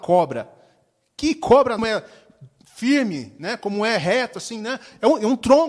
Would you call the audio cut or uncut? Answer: cut